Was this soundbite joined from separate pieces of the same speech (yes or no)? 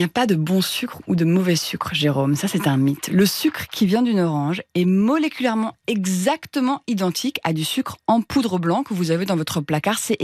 no